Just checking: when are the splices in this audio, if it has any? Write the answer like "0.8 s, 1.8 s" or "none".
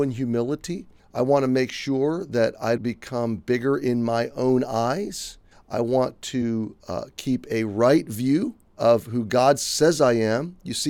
1.0 s, 2.8 s, 5.5 s, 6.8 s, 8.6 s